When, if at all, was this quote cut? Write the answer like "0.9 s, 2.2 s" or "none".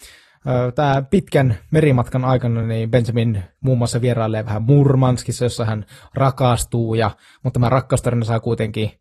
none